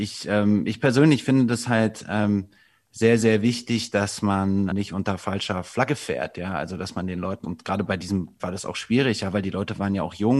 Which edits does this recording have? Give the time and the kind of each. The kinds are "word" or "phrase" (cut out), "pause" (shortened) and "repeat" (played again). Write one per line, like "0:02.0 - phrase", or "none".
0:04.7 - word
0:07.4 - word
0:08.4 - word